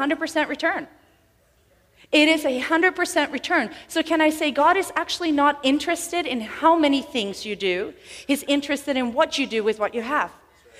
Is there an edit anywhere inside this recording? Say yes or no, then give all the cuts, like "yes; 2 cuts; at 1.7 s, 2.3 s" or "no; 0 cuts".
no; 0 cuts